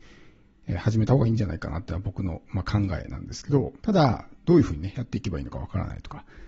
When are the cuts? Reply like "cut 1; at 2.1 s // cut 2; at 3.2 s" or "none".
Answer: cut 1; at 3.8 s